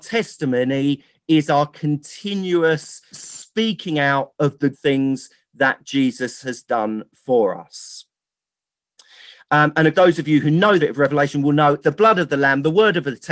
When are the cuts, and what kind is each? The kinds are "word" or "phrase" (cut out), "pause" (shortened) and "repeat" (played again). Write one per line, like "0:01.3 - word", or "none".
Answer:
0:03.1 - word
0:04.7 - word
0:09.9 - word
0:10.8 - word
0:11.8 - word